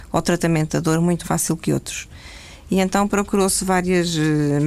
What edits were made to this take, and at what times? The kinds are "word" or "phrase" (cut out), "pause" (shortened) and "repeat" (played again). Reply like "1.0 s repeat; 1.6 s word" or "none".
1.2 s word